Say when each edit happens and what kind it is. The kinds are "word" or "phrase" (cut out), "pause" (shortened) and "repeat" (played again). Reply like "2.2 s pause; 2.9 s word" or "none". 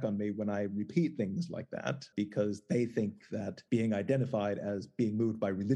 2.1 s word; 3.7 s pause